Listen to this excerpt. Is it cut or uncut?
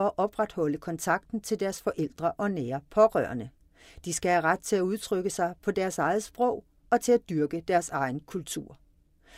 uncut